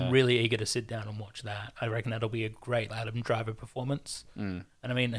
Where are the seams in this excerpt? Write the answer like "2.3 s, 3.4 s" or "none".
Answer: 2.9 s